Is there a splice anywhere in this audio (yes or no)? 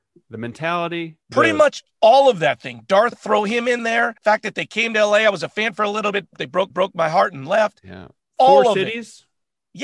yes